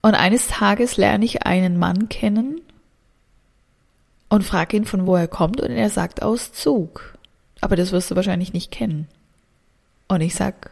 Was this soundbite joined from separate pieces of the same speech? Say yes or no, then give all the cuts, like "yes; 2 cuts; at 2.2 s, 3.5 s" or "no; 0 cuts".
no; 0 cuts